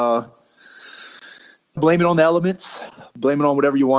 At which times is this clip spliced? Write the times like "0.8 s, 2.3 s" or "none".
1.8 s